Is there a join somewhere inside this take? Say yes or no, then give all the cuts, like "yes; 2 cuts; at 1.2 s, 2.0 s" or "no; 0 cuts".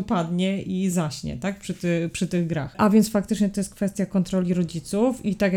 no; 0 cuts